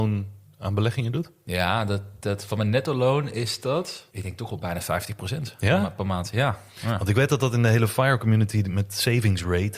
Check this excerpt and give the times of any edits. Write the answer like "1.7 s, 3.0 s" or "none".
4.1 s